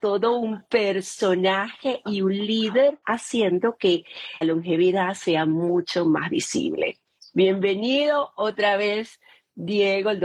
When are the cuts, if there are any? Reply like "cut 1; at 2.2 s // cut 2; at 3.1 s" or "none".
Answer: cut 1; at 3.0 s // cut 2; at 4.4 s